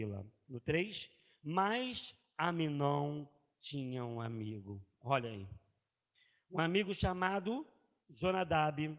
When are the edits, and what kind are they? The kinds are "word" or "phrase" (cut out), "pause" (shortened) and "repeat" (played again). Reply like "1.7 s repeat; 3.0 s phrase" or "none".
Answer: none